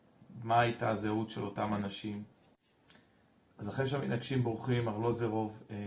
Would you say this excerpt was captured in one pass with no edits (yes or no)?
yes